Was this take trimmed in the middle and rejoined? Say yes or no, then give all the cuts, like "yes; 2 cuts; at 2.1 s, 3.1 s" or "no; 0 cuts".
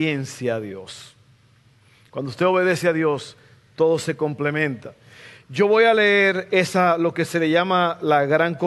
no; 0 cuts